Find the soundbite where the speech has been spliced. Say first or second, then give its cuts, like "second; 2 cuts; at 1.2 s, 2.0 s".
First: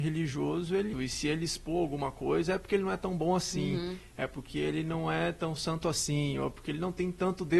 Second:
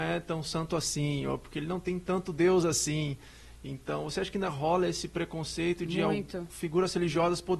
first; 1 cut; at 0.9 s